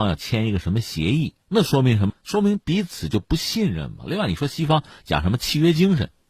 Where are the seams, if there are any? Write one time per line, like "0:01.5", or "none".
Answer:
0:01.4